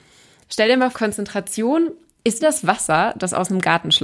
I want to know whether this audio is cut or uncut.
cut